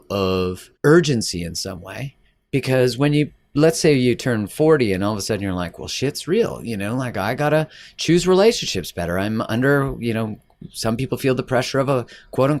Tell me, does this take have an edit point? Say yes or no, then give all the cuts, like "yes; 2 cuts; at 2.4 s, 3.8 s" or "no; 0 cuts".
no; 0 cuts